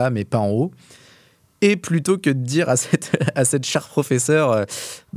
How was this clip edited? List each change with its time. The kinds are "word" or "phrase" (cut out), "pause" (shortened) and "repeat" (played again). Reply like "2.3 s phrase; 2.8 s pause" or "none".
none